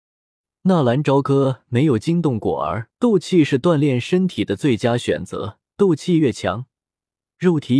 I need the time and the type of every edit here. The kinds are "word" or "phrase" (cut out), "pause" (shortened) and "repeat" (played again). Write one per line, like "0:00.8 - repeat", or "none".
0:02.9 - pause
0:05.7 - pause